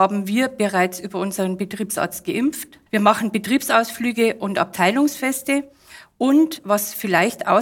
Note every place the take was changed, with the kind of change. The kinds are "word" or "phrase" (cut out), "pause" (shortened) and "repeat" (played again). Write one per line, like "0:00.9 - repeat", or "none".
0:02.9 - pause